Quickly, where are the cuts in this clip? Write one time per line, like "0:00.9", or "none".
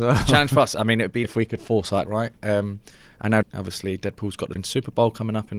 0:01.2
0:02.1
0:03.4
0:04.6